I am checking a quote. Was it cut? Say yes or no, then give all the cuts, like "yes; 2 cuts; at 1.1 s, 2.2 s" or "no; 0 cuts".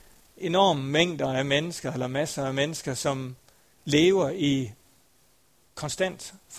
no; 0 cuts